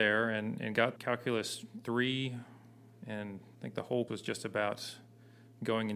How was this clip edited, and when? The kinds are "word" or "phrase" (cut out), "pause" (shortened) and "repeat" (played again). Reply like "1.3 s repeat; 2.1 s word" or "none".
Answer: 1.0 s word; 3.5 s word; 4.1 s word